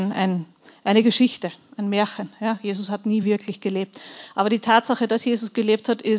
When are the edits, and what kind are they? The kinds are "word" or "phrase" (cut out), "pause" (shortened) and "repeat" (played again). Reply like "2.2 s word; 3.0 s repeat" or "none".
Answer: none